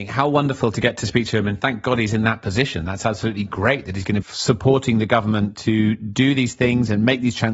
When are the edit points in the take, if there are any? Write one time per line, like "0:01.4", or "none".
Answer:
0:04.2

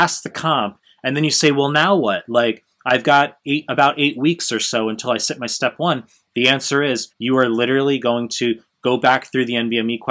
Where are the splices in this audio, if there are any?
0:07.1

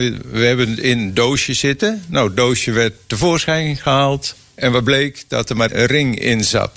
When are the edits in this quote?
0:05.7

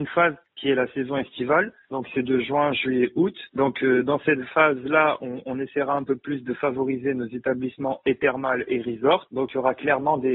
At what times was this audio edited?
0:09.3

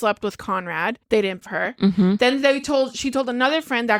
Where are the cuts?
0:01.0
0:01.4

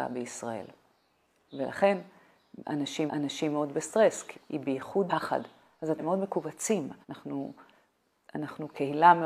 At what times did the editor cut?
0:03.1
0:04.3
0:05.1
0:06.0
0:07.0

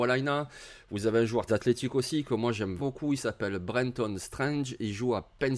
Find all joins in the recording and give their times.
0:01.5
0:02.8

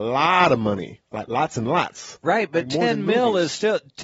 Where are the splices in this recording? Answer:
none

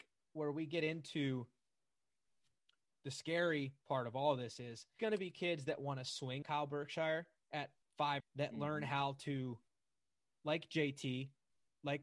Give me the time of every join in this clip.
0:05.0
0:06.4
0:08.2

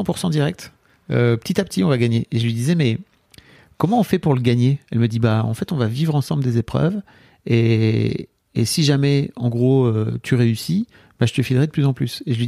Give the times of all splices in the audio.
none

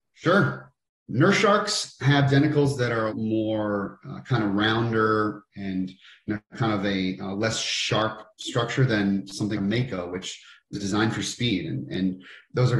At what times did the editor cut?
0:03.1
0:09.5
0:10.7

